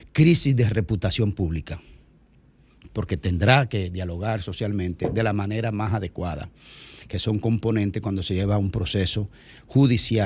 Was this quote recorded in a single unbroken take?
yes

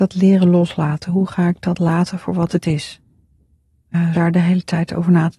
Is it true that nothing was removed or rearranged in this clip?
no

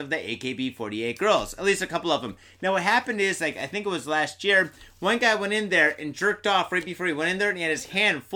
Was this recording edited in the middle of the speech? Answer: no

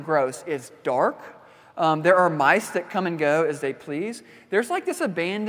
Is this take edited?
no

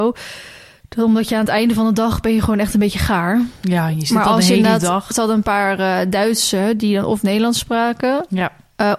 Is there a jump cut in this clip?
no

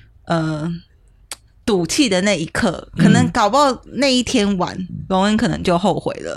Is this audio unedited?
no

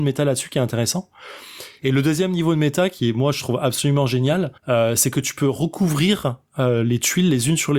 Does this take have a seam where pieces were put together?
yes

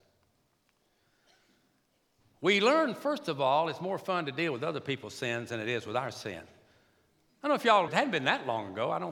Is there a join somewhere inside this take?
yes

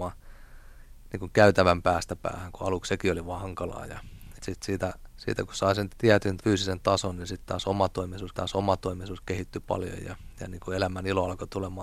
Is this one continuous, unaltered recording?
no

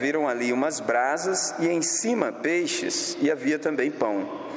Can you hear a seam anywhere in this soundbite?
no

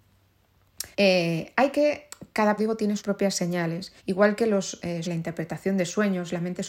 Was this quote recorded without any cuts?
no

